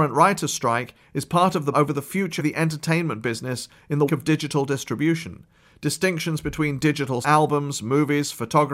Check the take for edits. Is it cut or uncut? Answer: cut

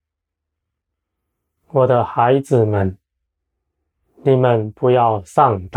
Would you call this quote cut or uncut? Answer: uncut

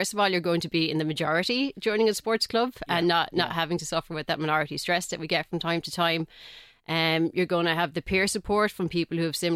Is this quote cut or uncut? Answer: uncut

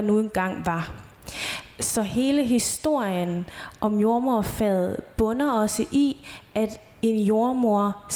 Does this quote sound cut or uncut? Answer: uncut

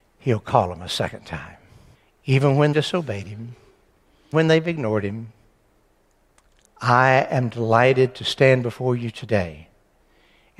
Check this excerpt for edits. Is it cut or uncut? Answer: cut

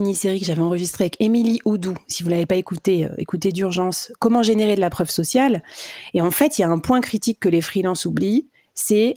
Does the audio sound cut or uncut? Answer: uncut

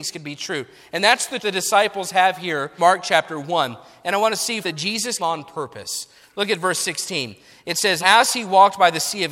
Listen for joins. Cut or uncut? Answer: cut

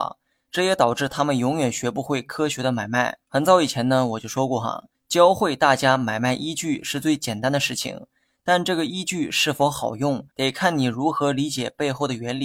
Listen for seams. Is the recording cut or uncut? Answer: cut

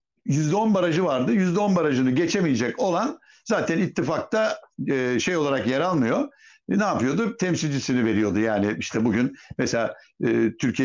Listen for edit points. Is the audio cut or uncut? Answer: uncut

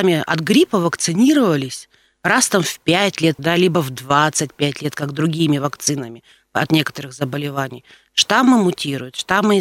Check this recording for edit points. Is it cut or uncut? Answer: cut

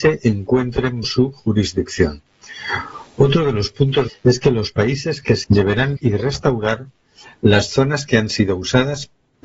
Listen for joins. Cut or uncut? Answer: cut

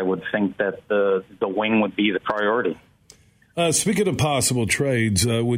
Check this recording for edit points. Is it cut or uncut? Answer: uncut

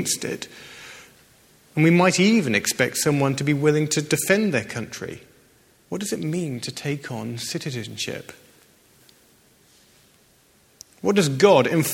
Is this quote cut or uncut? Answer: uncut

